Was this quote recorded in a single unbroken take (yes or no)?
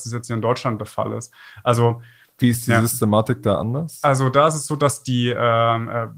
yes